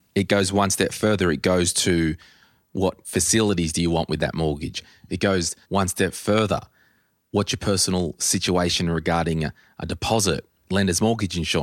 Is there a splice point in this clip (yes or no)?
yes